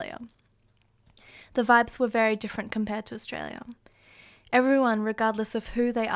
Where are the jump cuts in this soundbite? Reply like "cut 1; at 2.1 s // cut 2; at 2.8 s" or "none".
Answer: none